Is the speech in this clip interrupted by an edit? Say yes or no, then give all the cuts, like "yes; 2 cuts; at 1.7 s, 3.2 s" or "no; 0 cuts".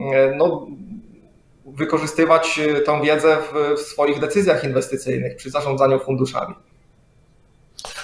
no; 0 cuts